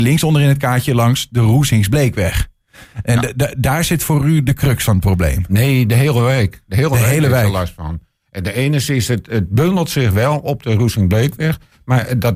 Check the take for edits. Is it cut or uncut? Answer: uncut